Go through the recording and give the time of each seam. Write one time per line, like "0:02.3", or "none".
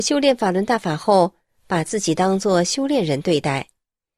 none